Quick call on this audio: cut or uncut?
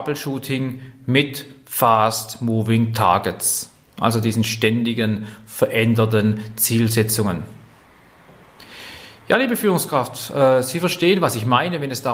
uncut